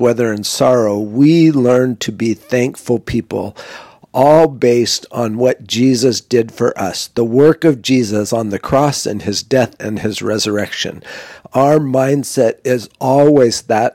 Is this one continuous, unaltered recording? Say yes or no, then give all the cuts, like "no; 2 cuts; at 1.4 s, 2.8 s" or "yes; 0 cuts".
yes; 0 cuts